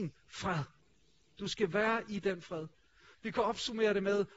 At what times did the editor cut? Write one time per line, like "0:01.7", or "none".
none